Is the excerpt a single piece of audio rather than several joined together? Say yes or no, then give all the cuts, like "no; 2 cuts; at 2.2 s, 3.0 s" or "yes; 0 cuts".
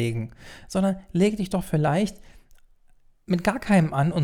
yes; 0 cuts